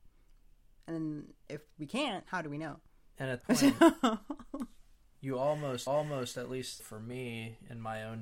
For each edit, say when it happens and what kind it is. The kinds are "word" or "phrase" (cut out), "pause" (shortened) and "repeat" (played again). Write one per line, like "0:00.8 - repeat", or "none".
0:02.2 - word
0:03.4 - word
0:05.9 - repeat
0:06.8 - phrase